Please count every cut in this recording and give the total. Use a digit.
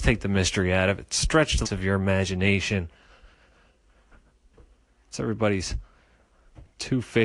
1